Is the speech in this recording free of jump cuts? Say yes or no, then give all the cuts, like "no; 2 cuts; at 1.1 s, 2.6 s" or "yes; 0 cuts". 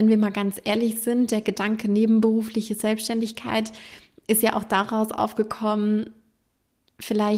yes; 0 cuts